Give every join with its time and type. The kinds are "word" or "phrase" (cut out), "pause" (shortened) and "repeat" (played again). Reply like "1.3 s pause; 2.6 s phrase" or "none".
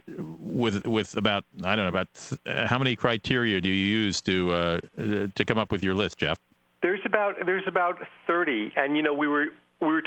none